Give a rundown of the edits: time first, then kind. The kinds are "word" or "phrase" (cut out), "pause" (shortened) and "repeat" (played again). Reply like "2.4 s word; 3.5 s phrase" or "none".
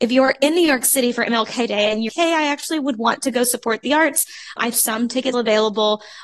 2.1 s word; 4.7 s phrase; 5.3 s word